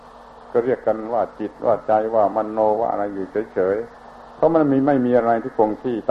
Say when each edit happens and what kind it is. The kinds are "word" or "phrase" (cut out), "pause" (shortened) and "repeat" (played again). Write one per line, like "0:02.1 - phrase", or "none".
0:03.9 - pause